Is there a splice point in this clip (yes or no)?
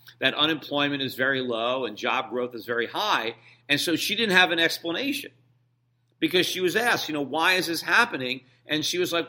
no